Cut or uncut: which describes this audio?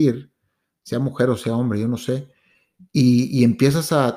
uncut